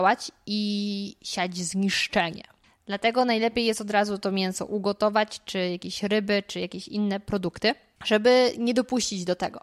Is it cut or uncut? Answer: uncut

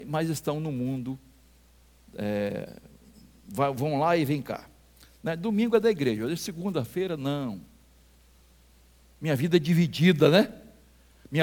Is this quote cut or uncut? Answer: uncut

